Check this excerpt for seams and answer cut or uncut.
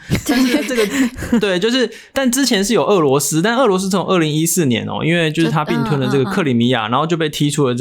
cut